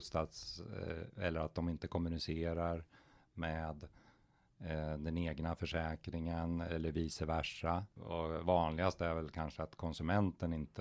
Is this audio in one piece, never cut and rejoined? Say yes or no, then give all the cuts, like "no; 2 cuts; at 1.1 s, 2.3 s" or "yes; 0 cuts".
yes; 0 cuts